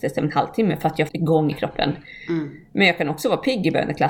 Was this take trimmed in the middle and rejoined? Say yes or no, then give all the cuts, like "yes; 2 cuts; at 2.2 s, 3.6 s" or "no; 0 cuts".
yes; 2 cuts; at 1.1 s, 1.5 s